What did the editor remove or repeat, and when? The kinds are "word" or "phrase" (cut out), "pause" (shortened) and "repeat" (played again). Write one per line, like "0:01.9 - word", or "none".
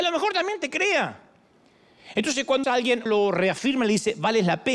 0:02.6 - word
0:03.1 - word